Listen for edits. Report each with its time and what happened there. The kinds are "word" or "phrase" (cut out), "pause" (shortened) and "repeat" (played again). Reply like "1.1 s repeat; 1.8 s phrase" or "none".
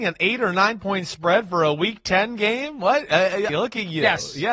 3.5 s word